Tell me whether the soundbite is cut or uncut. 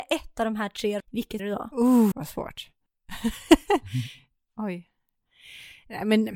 cut